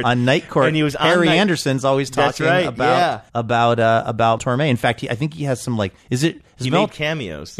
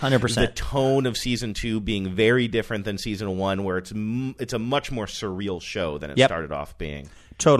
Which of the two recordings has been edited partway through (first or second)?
first